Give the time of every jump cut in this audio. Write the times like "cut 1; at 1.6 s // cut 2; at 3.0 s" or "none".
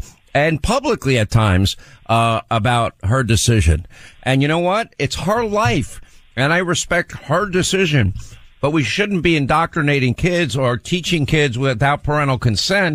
none